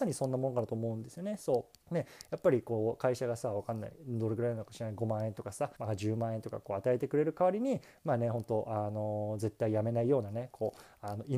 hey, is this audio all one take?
no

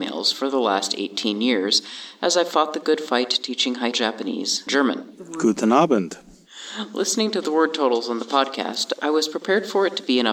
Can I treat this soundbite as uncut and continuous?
no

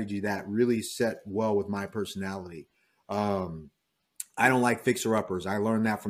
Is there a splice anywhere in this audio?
no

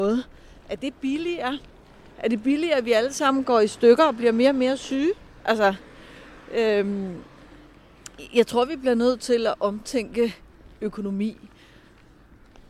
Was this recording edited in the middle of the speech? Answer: no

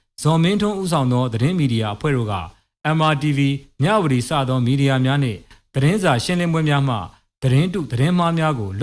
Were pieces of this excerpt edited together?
no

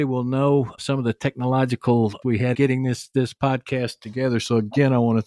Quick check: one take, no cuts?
no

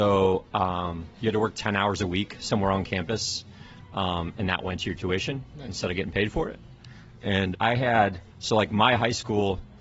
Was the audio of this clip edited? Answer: yes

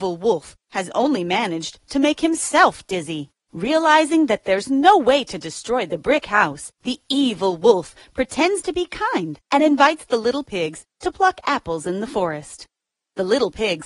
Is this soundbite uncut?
no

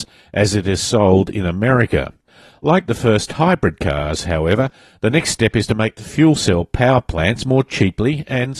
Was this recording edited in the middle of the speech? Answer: no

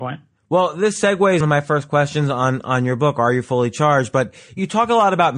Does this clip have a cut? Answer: yes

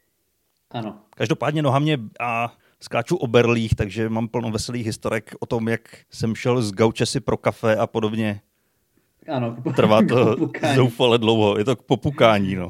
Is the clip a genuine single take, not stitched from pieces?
no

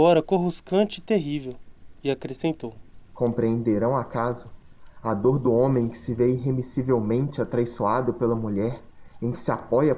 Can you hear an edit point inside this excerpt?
no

